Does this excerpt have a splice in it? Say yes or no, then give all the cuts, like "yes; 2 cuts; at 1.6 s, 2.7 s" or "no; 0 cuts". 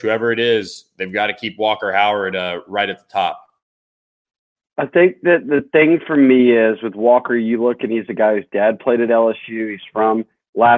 no; 0 cuts